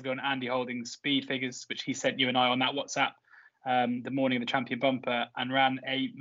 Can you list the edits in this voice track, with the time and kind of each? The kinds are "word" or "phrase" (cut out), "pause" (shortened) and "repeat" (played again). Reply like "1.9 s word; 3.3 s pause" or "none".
none

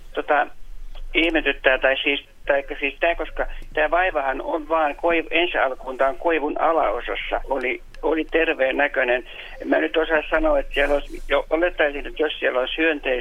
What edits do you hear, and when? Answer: 7.4 s phrase

